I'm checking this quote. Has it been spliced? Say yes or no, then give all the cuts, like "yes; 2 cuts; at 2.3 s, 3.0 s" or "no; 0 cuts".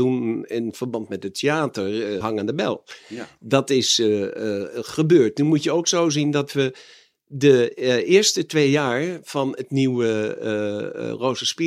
yes; 1 cut; at 2.2 s